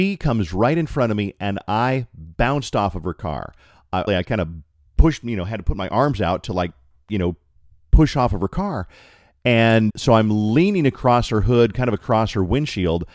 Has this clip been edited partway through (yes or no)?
yes